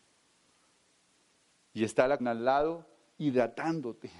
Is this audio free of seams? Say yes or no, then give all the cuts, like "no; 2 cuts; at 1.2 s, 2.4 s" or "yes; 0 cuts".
no; 1 cut; at 2.2 s